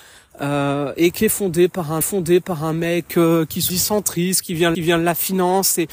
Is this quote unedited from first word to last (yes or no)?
no